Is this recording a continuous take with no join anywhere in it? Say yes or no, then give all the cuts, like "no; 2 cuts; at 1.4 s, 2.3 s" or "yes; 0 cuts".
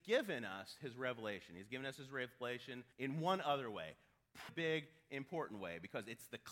no; 2 cuts; at 2.9 s, 4.5 s